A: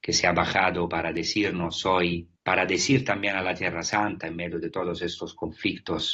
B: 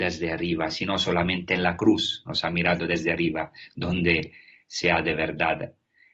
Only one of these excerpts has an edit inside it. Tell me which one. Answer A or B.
A